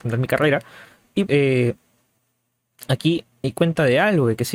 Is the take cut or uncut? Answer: cut